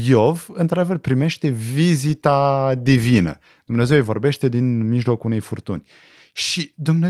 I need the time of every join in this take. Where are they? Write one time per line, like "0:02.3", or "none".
none